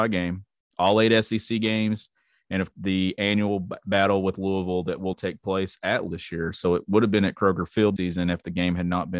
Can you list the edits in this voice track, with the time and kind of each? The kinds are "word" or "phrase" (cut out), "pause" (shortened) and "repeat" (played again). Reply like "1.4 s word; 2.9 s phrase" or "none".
2.7 s word; 5.1 s word; 6.1 s word; 8.0 s word

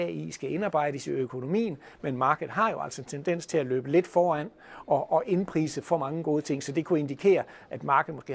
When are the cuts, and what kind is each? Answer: none

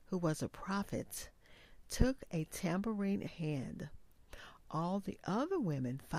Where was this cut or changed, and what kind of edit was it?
3.3 s word

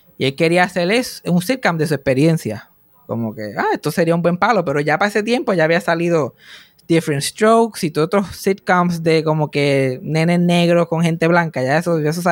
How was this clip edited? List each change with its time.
none

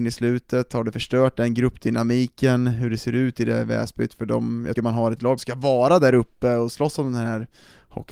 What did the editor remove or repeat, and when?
4.8 s word; 5.4 s phrase

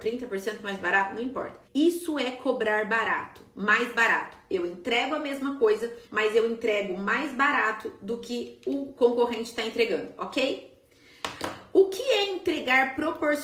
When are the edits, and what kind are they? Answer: 1.7 s pause; 6.0 s pause

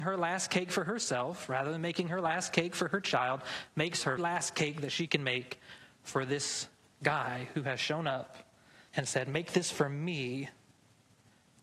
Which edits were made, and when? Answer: 4.2 s word; 8.9 s pause

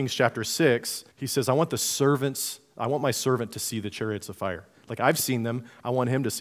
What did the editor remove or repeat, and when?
1.1 s pause

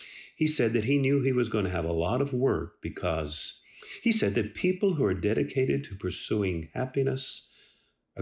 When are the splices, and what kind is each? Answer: none

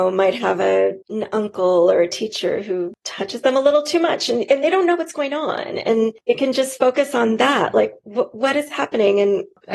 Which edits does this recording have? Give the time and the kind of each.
1.0 s pause

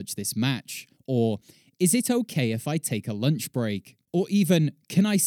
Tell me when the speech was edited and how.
none

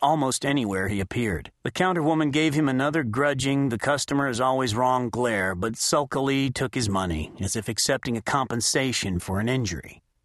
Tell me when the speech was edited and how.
1.6 s pause

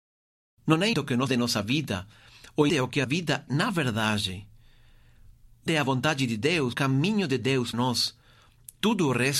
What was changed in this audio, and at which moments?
0.9 s word; 1.3 s word; 2.7 s word; 3.0 s word; 3.5 s word; 5.7 s word; 6.7 s word; 7.7 s word

